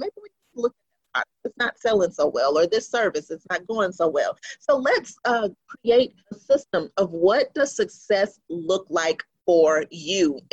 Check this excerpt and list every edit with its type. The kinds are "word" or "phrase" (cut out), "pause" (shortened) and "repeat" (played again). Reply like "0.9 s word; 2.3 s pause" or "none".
5.2 s pause; 6.2 s pause

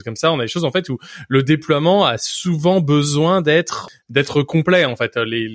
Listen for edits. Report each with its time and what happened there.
none

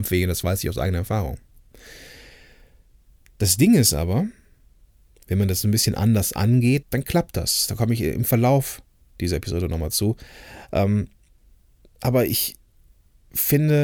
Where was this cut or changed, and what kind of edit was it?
6.8 s word

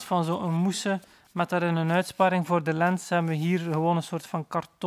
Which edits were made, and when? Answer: none

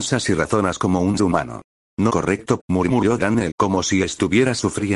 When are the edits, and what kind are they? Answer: 1.2 s word; 2.1 s word; 2.6 s phrase; 3.5 s word

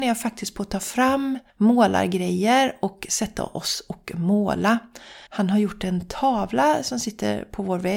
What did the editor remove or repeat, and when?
1.5 s pause; 5.3 s pause

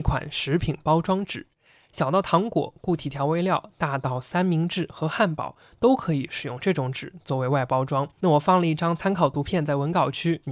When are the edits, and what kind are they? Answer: 8.1 s pause

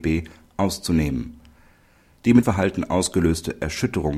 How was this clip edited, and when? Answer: 2.4 s phrase

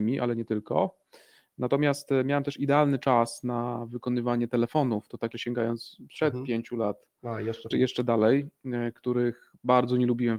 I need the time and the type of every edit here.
5.3 s word; 7.7 s word

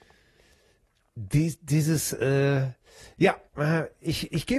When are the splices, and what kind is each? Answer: 3.5 s pause

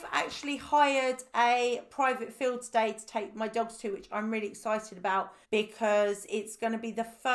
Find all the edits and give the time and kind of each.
5.4 s pause

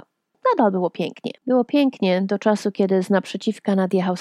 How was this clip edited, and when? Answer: 1.4 s pause

